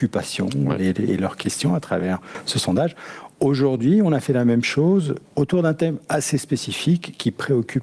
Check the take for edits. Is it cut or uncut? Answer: cut